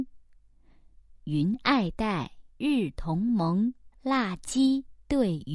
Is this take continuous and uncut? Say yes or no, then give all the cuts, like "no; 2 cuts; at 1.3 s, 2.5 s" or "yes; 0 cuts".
no; 2 cuts; at 2.5 s, 3.9 s